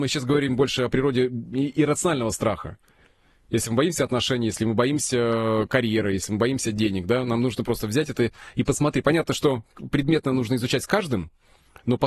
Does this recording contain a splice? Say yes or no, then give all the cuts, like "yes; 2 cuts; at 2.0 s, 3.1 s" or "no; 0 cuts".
no; 0 cuts